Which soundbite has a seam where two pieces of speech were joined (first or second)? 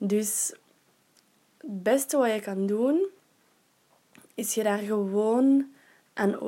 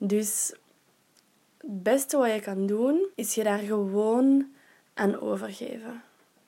second